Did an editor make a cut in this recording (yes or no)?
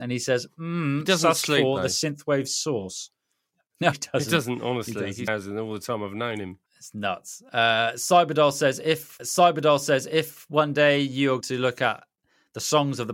yes